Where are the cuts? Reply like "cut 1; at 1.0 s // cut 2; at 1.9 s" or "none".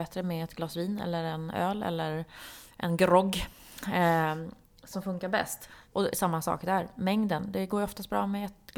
cut 1; at 4.9 s

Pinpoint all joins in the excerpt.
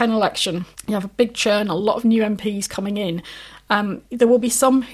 none

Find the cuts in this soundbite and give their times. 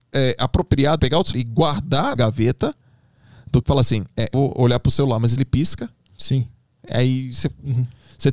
cut 1; at 1.0 s // cut 2; at 1.3 s // cut 3; at 2.2 s // cut 4; at 3.6 s // cut 5; at 4.3 s // cut 6; at 5.4 s

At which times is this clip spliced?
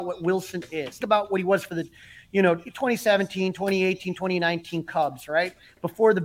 cut 1; at 1.0 s

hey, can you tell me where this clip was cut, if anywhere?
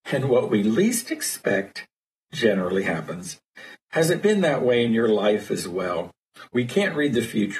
none

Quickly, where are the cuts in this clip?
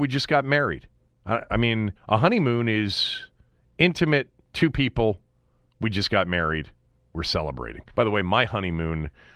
cut 1; at 1.0 s // cut 2; at 2.0 s // cut 3; at 4.4 s // cut 4; at 7.9 s

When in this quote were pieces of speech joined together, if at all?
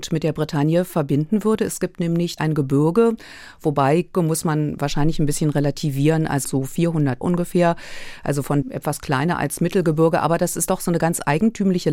cut 1; at 2.4 s // cut 2; at 4.1 s // cut 3; at 6.4 s // cut 4; at 7.2 s // cut 5; at 8.6 s

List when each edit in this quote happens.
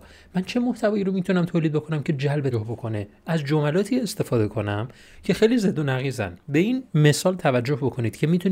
cut 1; at 2.5 s // cut 2; at 6.4 s // cut 3; at 6.9 s

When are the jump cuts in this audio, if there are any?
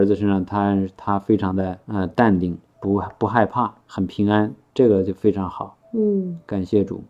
cut 1; at 1.8 s // cut 2; at 3.8 s // cut 3; at 5.8 s

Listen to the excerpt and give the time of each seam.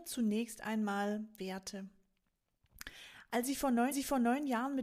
cut 1; at 1.4 s // cut 2; at 3.9 s

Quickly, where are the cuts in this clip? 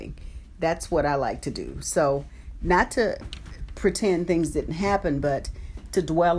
none

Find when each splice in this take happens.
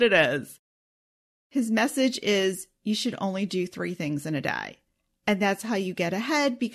none

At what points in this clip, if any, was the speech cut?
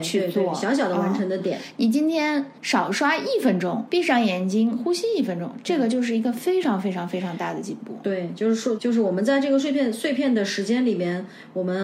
cut 1; at 2.6 s // cut 2; at 3.9 s // cut 3; at 8.8 s

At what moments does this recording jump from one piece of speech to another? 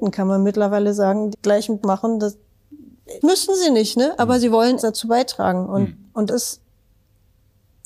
cut 1; at 1.3 s // cut 2; at 1.8 s // cut 3; at 3.2 s // cut 4; at 4.8 s // cut 5; at 6.3 s

